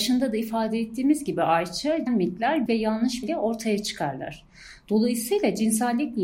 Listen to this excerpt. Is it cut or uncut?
cut